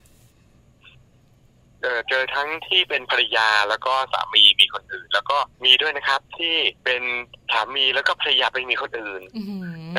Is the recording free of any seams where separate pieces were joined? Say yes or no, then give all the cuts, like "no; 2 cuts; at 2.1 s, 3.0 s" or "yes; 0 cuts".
no; 3 cuts; at 5.5 s, 6.2 s, 6.8 s